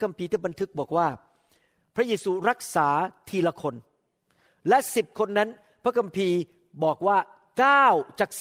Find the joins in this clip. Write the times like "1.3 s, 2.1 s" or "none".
none